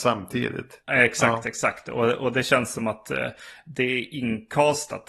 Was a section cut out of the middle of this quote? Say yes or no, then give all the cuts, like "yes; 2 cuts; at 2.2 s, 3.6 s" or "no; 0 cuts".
no; 0 cuts